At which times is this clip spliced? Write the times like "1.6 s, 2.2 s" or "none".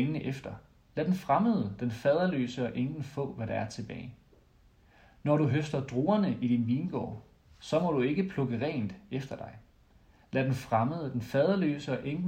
none

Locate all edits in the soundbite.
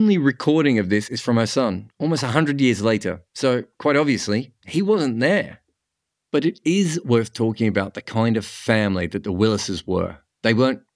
3.3 s

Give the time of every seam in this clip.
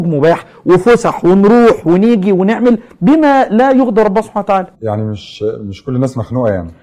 4.7 s

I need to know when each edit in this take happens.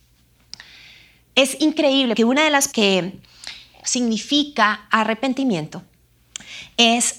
2.2 s, 2.7 s, 3.8 s

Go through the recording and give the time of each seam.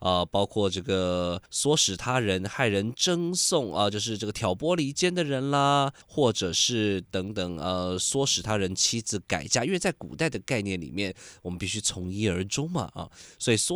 1.5 s, 6.0 s

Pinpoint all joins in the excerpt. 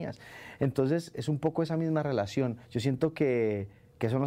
1.1 s, 2.6 s

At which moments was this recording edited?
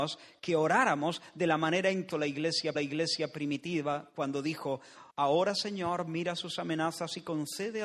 2.1 s, 2.8 s, 5.1 s

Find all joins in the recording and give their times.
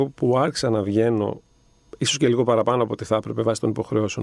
none

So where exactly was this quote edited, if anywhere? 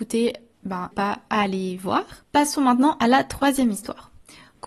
0.9 s, 1.3 s, 2.2 s

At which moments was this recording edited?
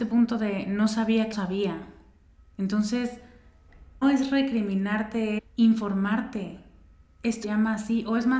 1.3 s, 4.0 s, 5.4 s, 7.4 s

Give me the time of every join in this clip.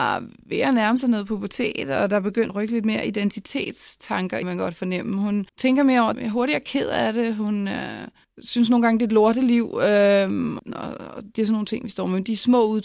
2.5 s, 4.4 s, 5.5 s, 6.1 s, 8.2 s, 10.6 s

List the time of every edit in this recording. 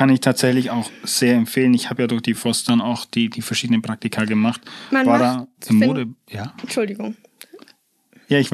none

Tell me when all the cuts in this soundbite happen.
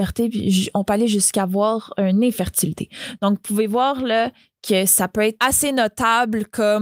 none

